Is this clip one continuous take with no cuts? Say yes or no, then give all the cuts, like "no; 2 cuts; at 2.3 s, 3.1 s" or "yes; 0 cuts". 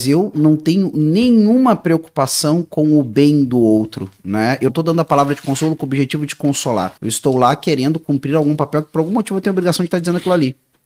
no; 2 cuts; at 4.7 s, 7.0 s